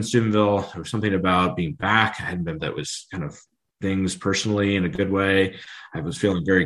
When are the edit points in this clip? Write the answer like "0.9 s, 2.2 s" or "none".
2.6 s, 3.8 s